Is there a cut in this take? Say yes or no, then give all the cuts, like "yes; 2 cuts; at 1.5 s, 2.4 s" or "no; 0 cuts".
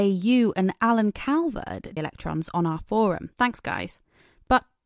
yes; 2 cuts; at 2.0 s, 3.3 s